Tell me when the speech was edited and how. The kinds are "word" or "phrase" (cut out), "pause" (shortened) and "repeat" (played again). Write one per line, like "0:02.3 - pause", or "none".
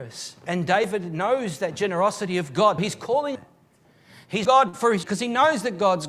0:02.8 - word
0:03.4 - word
0:04.5 - word
0:05.0 - word